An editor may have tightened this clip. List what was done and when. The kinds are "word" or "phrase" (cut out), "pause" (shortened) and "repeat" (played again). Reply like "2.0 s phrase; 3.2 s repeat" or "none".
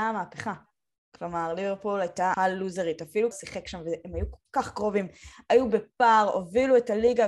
2.3 s word; 3.3 s word